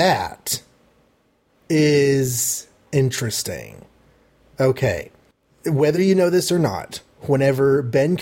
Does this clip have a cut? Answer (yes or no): no